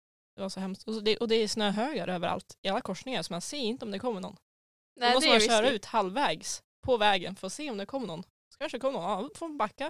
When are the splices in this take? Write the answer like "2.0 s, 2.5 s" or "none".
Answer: none